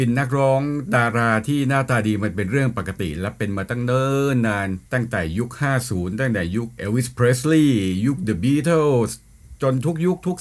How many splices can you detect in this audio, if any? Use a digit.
1